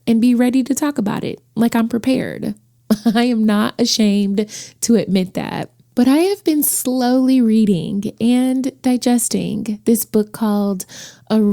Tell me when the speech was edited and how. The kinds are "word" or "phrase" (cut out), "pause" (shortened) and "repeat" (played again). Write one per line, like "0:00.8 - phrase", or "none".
none